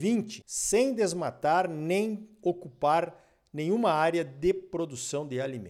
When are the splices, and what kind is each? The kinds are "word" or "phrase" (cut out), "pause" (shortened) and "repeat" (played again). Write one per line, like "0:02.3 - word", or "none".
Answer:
none